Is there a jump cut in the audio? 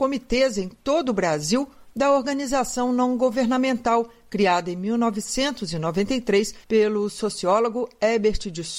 yes; 1 cut; at 6.6 s

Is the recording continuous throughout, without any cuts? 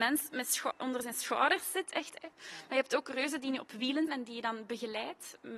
no; 1 cut; at 4.1 s

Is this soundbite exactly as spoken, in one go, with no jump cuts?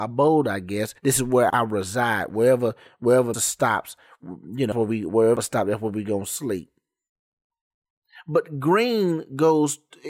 no; 5 cuts; at 1.0 s, 1.5 s, 3.3 s, 4.7 s, 5.4 s

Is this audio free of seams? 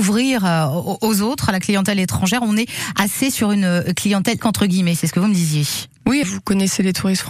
no; 2 cuts; at 4.4 s, 6.2 s

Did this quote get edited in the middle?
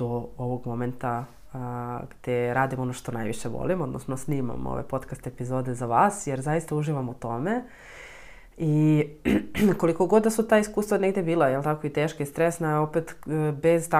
no; 0 cuts

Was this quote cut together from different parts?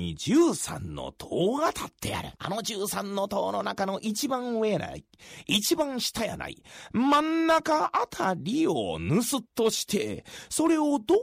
yes; 2 cuts; at 2.4 s, 9.5 s

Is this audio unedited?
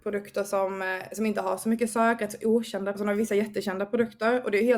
no; 1 cut; at 2.9 s

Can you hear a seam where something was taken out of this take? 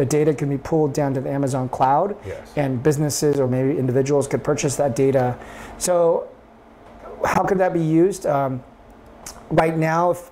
no; 0 cuts

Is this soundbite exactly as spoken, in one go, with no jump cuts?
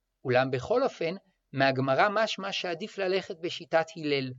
yes; 0 cuts

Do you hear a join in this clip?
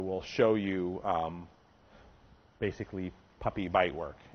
no; 0 cuts

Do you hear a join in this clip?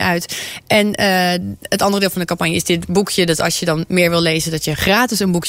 no; 0 cuts

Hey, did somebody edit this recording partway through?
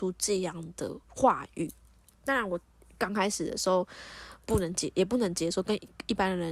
yes; 1 cut; at 1.0 s

